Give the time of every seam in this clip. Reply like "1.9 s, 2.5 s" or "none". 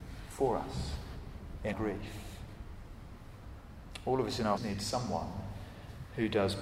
1.7 s, 4.6 s